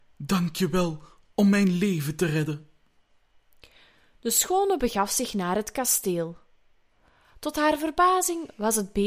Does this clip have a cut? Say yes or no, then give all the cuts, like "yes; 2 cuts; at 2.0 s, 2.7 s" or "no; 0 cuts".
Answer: no; 0 cuts